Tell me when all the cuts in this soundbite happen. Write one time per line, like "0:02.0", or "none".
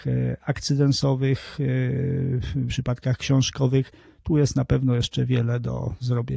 0:02.7

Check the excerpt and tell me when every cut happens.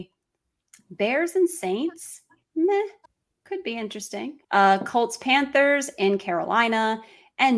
0:03.0
0:04.4

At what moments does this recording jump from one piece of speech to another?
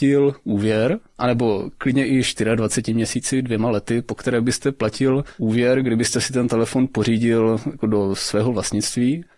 none

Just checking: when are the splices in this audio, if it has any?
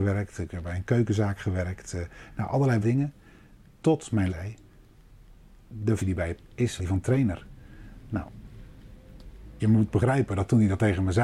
0:02.8
0:04.3
0:06.0
0:06.4
0:06.8
0:09.6

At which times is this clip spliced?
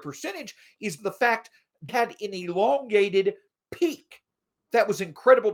0:01.0
0:01.9

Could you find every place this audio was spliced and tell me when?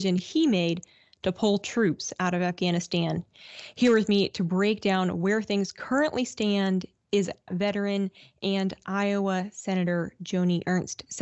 0:07.5

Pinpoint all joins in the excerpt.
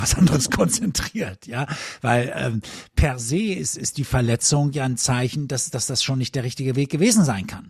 none

